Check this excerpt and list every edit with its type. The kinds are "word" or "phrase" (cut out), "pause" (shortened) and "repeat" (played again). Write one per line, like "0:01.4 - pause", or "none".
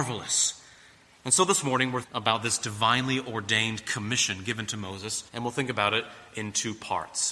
0:02.0 - word
0:05.3 - pause